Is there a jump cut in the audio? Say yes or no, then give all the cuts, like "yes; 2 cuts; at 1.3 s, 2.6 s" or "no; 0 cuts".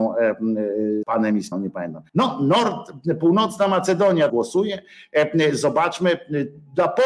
yes; 4 cuts; at 1.0 s, 1.5 s, 2.1 s, 4.3 s